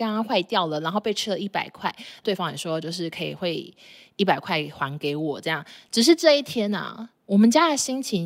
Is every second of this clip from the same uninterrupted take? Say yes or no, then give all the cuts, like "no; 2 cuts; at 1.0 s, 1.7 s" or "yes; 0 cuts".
yes; 0 cuts